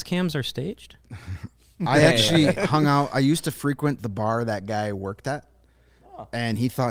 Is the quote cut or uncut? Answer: uncut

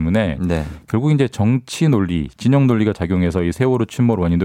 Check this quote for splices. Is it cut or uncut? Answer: uncut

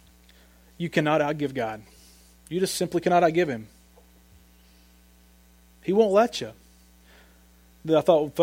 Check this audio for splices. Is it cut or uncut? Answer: uncut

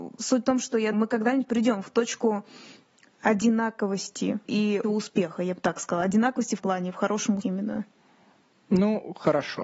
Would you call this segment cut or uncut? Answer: cut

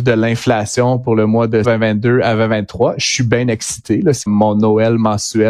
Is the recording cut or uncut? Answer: cut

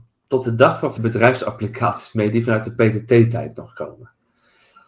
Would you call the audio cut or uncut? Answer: cut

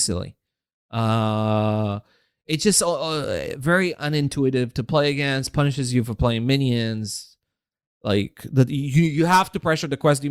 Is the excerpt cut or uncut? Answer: uncut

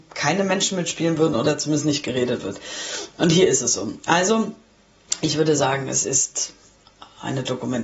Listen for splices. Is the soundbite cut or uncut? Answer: uncut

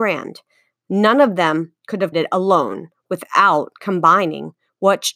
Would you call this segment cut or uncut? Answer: cut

